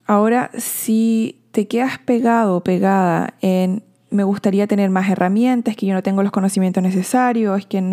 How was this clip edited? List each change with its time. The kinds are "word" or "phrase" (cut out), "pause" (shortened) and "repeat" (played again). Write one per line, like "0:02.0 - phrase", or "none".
none